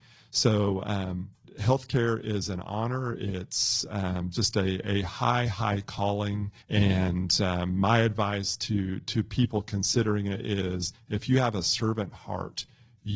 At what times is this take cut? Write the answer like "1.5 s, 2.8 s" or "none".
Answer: 6.6 s